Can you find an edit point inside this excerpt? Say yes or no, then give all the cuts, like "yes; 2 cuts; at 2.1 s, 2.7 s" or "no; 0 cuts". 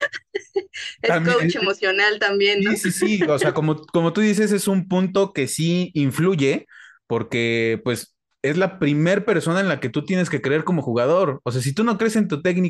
no; 0 cuts